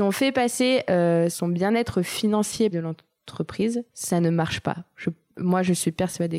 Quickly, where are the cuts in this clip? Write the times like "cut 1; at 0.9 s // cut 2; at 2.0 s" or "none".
cut 1; at 1.3 s // cut 2; at 2.7 s // cut 3; at 3.9 s